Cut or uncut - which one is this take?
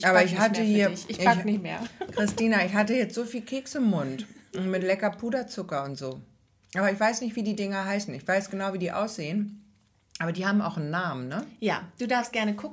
uncut